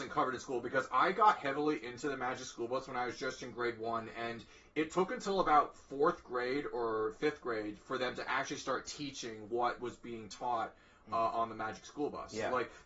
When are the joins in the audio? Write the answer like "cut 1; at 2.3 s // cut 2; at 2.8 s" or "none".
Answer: none